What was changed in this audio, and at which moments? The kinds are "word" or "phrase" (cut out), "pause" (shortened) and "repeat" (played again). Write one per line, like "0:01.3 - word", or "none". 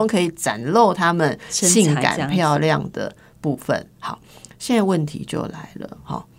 none